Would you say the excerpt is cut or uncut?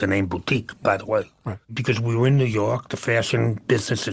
cut